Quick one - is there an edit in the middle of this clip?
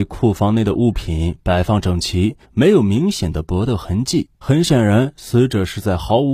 yes; 2 cuts; at 2.4 s, 4.4 s

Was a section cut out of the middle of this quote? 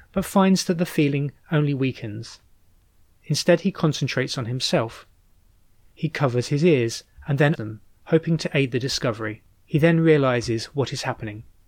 yes; 2 cuts; at 7.6 s, 9.5 s

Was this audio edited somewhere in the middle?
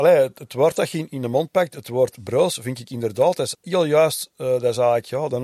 yes; 2 cuts; at 1.1 s, 3.5 s

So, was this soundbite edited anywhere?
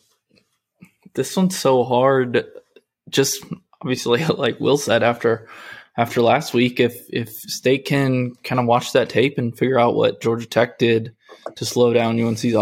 no; 0 cuts

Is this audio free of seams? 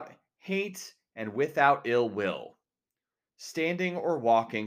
yes; 0 cuts

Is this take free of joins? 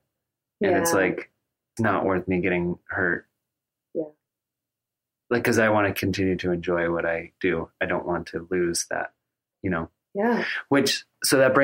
no; 1 cut; at 1.8 s

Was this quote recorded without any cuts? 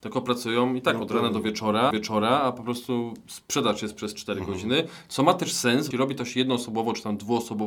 no; 2 cuts; at 1.9 s, 5.9 s

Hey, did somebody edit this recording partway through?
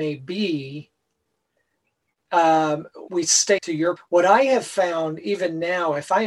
yes; 3 cuts; at 3.1 s, 3.6 s, 4.0 s

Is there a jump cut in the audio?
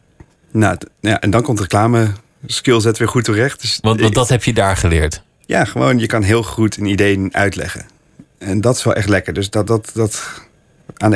no; 0 cuts

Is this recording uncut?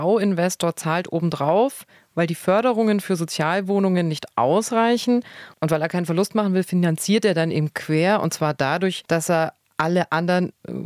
yes; 0 cuts

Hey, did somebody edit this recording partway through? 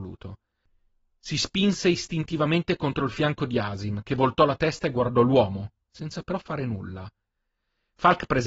no; 0 cuts

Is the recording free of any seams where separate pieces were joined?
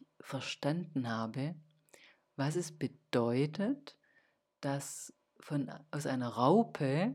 yes; 0 cuts

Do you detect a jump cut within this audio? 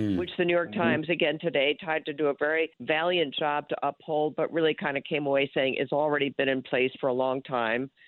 yes; 1 cut; at 2.7 s

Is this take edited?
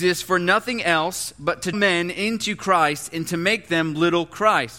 yes; 1 cut; at 1.7 s

